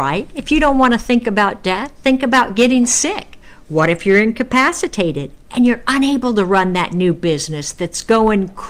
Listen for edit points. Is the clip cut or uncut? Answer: uncut